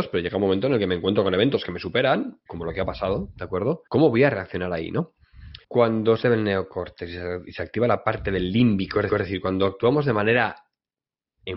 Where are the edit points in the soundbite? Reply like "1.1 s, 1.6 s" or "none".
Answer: 2.5 s, 3.9 s, 5.6 s, 6.2 s, 9.1 s